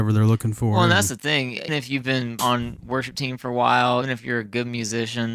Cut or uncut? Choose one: cut